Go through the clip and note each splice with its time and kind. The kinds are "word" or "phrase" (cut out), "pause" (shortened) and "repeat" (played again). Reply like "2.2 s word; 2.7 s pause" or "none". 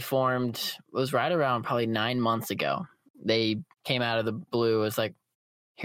3.7 s pause